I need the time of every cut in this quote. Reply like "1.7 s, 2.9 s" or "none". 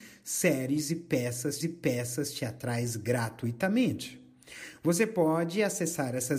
1.6 s